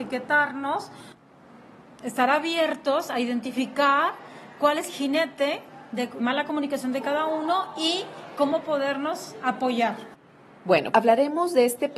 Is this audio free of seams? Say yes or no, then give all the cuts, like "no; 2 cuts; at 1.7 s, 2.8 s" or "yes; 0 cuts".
no; 3 cuts; at 4.9 s, 6.2 s, 10.9 s